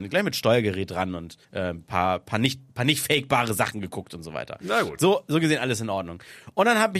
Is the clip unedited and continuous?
no; 2 cuts; at 1.4 s, 2.7 s

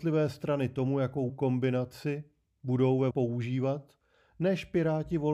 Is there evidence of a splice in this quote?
yes; 2 cuts; at 1.3 s, 3.1 s

